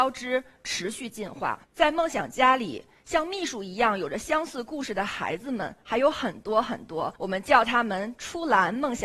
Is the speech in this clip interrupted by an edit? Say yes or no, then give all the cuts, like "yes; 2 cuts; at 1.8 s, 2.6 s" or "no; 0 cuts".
yes; 2 cuts; at 1.6 s, 7.2 s